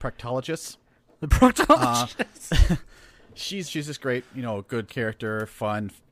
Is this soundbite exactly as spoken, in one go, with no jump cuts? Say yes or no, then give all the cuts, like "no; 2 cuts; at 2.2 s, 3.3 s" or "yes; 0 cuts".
no; 2 cuts; at 3.7 s, 4.9 s